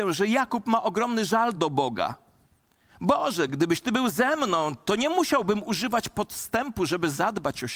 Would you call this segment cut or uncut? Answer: uncut